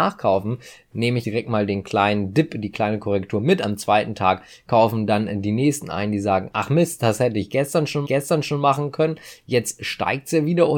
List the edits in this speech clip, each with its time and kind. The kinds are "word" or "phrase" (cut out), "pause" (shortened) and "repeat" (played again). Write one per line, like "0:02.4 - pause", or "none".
0:01.2 - word
0:08.0 - repeat